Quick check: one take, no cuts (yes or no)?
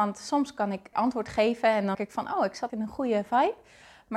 no